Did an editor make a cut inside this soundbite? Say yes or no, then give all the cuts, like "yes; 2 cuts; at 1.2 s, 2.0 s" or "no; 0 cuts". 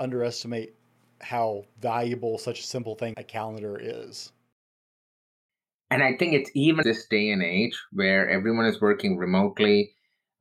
yes; 2 cuts; at 3.1 s, 6.8 s